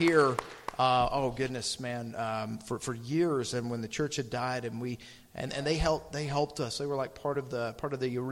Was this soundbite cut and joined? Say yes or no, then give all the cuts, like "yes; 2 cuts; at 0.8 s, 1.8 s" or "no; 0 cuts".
no; 0 cuts